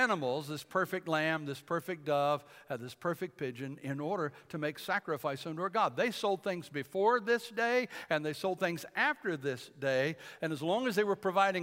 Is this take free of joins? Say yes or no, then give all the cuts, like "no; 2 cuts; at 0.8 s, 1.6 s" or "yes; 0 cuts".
yes; 0 cuts